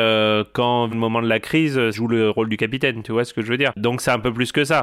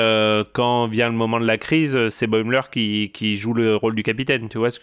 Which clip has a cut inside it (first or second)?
first